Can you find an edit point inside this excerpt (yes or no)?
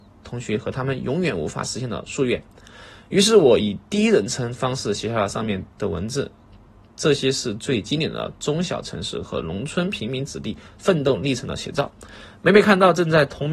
no